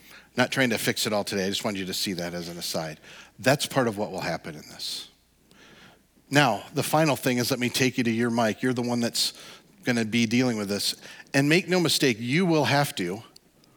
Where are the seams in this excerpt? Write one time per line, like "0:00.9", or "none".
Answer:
none